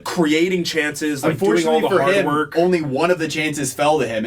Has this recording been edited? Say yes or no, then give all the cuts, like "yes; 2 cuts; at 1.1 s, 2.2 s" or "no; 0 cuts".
no; 0 cuts